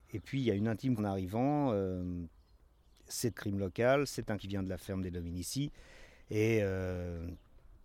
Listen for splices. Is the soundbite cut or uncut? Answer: cut